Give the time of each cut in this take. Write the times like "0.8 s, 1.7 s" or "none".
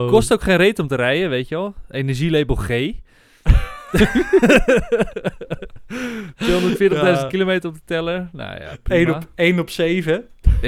none